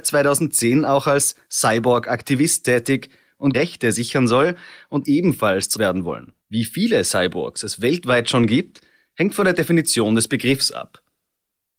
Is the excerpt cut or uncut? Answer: cut